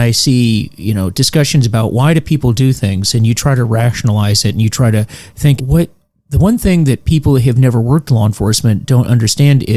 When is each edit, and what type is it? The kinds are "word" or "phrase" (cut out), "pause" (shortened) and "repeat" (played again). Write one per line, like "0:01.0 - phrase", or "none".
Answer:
0:05.6 - phrase